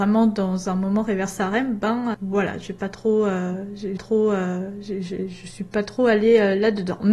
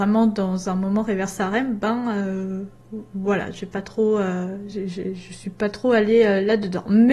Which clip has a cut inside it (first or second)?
first